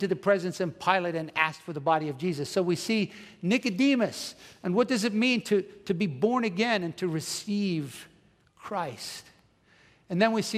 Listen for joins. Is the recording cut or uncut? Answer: uncut